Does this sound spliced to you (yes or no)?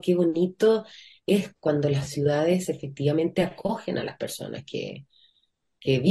no